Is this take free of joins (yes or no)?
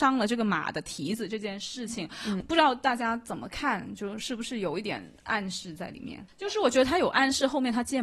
no